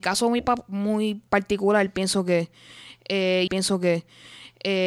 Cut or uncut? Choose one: cut